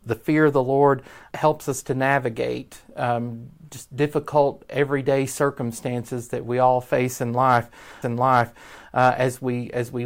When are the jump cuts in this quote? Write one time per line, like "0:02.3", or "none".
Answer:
0:01.3
0:08.0